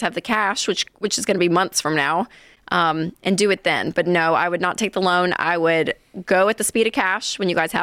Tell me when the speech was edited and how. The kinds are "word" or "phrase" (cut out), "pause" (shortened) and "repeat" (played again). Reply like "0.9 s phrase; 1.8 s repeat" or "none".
none